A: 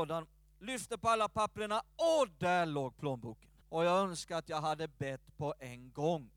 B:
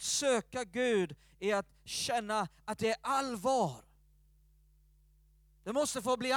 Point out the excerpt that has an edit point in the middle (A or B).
A